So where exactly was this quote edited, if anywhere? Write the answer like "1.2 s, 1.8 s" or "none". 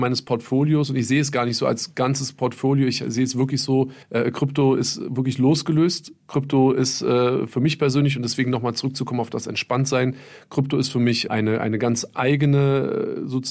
4.0 s, 11.3 s